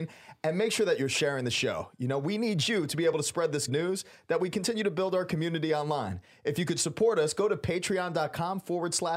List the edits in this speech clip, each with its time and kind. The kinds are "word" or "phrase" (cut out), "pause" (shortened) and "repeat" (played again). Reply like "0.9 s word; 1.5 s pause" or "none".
3.7 s word